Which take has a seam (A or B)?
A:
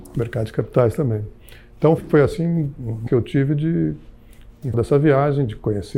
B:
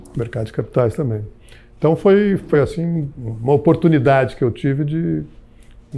A